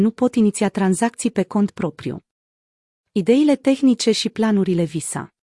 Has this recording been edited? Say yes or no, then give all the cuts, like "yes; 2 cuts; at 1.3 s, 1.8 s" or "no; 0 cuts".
no; 0 cuts